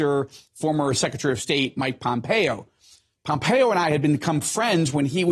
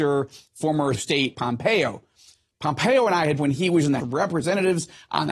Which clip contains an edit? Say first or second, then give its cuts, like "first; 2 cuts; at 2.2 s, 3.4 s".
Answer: second; 4 cuts; at 0.9 s, 1.3 s, 3.4 s, 4.0 s